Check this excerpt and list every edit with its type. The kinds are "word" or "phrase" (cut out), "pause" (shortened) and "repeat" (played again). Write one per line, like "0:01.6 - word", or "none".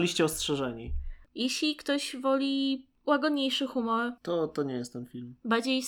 0:01.3 - pause
0:04.2 - pause

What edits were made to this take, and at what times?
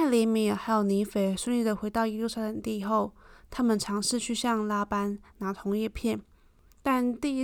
none

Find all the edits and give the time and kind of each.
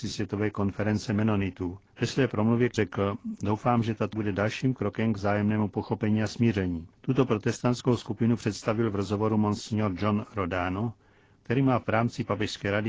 0:01.9 - pause
0:02.7 - word
0:04.1 - word
0:06.9 - pause

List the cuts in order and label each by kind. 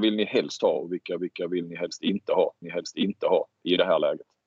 0:01.2 - repeat
0:02.6 - repeat

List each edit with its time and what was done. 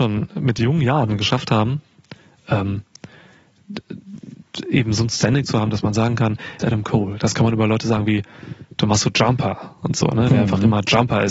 0:06.6 - phrase

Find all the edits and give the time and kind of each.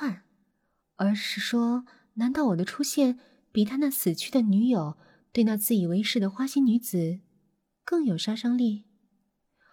none

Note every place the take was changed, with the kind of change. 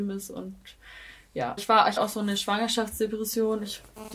0:01.6 - word
0:02.0 - word

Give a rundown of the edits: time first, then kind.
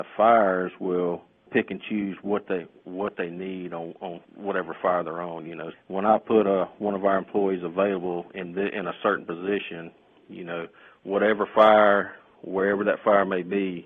0:04.2 - pause
0:05.7 - word

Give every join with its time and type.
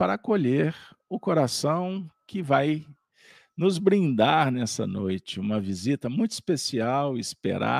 none

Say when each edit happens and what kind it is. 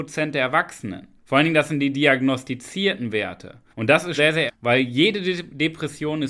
0:01.2 - pause
0:03.7 - pause
0:04.2 - word
0:04.5 - word

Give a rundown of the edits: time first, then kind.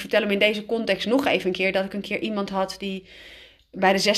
none

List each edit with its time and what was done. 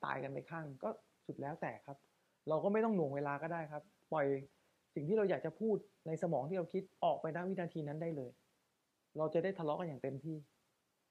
none

